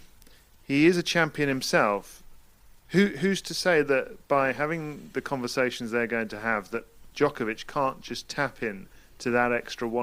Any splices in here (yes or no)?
no